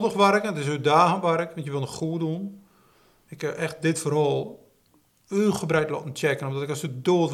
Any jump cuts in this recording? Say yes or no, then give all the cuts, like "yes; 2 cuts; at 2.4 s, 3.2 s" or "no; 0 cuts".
no; 0 cuts